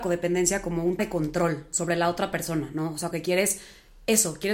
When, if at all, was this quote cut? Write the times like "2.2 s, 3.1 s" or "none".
1.0 s, 3.1 s